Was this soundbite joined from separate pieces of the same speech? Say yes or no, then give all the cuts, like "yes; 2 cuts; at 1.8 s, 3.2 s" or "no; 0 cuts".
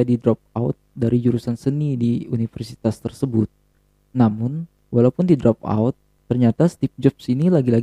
no; 0 cuts